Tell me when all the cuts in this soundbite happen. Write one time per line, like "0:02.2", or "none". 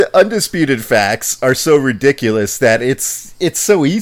none